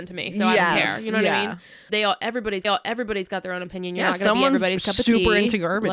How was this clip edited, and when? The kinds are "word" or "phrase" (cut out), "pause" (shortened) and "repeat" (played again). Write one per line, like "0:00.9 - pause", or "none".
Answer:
0:01.9 - word
0:02.6 - repeat